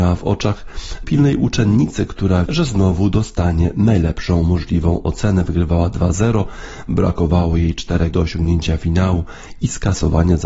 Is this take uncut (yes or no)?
no